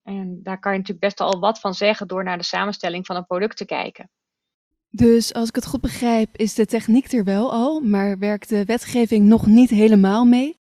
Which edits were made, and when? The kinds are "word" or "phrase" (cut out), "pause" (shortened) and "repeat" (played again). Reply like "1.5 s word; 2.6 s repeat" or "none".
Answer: none